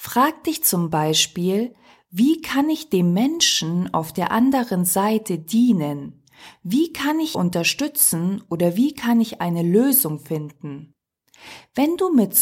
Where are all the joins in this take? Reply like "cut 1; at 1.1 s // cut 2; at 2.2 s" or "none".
cut 1; at 7.3 s